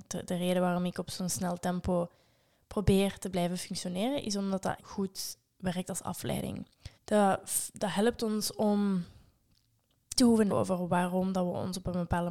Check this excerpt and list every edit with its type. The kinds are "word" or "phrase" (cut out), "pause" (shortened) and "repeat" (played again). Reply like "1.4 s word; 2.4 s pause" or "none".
4.8 s word; 6.9 s pause; 10.2 s word; 10.5 s word

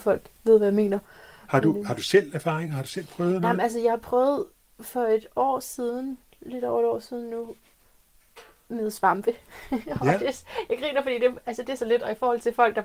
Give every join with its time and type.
11.8 s word

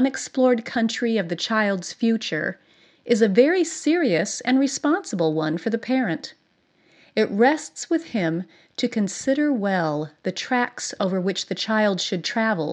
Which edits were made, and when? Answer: none

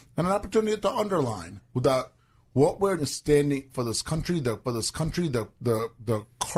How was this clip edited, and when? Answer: 3.0 s word; 3.7 s word; 4.6 s repeat

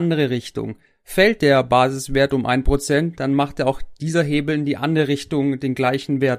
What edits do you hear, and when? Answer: none

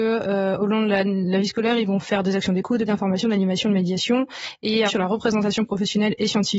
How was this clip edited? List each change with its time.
2.9 s word; 4.9 s phrase

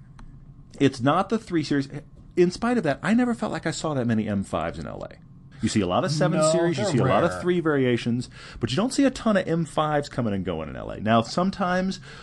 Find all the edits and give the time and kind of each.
5.5 s pause

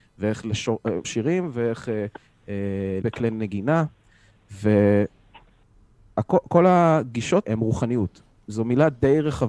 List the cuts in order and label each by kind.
1.0 s word; 3.0 s word; 7.4 s word

